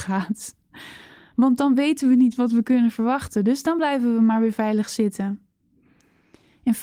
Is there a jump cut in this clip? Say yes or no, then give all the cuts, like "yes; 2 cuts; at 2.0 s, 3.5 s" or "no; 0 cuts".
no; 0 cuts